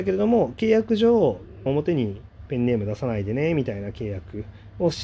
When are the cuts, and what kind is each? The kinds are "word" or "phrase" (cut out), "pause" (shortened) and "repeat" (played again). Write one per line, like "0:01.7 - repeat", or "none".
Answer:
0:01.7 - phrase